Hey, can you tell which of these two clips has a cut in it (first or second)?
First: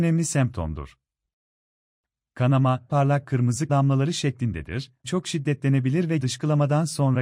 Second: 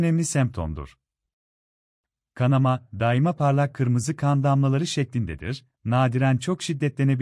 first